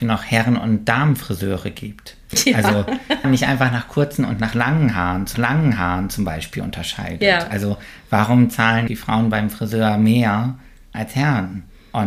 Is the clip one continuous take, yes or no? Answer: no